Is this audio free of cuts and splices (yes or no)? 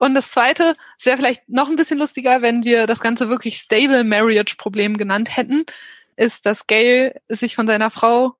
yes